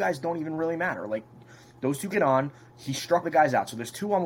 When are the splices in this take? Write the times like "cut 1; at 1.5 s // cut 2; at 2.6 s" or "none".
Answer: cut 1; at 2.1 s // cut 2; at 3.2 s

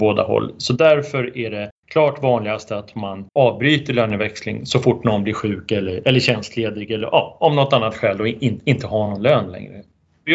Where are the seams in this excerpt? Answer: cut 1; at 1.8 s

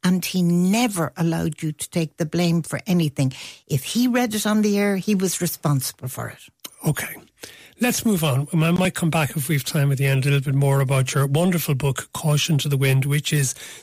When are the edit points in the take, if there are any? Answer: none

